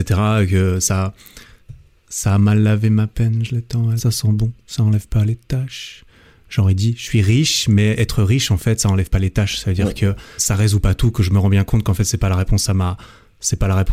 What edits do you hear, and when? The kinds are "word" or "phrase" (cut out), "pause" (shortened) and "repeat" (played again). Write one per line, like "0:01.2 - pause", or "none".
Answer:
0:04.0 - phrase
0:10.4 - word